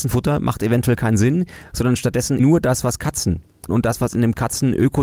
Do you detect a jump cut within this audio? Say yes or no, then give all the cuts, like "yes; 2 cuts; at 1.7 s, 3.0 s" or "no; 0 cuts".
yes; 2 cuts; at 2.4 s, 3.7 s